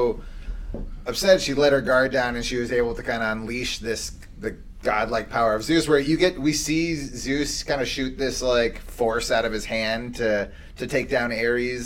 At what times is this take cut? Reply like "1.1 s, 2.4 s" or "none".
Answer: none